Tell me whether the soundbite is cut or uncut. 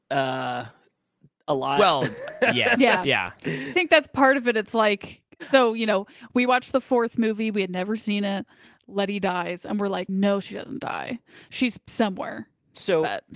cut